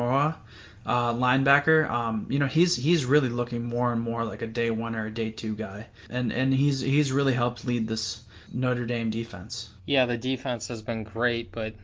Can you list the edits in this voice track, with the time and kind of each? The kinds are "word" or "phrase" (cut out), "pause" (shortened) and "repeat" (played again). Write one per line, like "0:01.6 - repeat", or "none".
0:09.8 - pause